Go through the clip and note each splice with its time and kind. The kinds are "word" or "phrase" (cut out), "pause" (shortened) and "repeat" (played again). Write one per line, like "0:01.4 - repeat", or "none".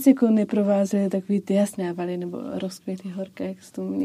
0:01.8 - phrase